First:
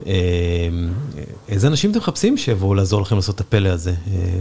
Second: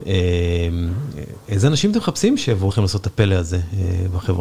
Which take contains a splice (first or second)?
second